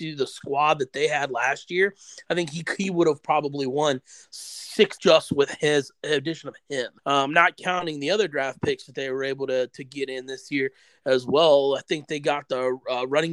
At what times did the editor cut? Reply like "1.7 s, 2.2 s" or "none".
5.0 s, 7.0 s